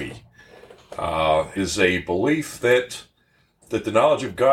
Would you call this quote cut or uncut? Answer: cut